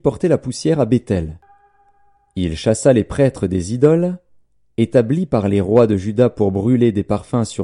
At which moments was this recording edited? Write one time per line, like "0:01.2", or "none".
none